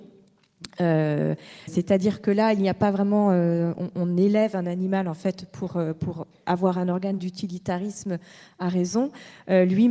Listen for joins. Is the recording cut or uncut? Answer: cut